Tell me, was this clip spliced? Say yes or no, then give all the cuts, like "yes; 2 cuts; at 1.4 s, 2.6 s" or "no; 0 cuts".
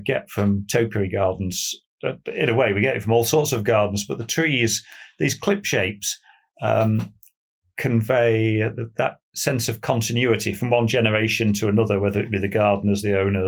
no; 0 cuts